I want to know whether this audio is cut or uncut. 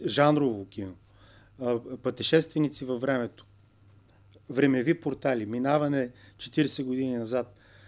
uncut